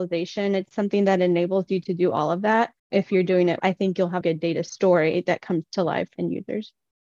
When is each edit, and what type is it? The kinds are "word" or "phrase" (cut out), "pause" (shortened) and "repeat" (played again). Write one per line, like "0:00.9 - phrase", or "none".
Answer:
0:02.8 - pause
0:03.6 - word
0:04.2 - phrase
0:06.2 - word